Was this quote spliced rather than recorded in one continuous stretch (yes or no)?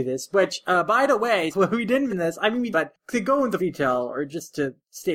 yes